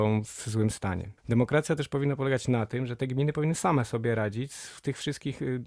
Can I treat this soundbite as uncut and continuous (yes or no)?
no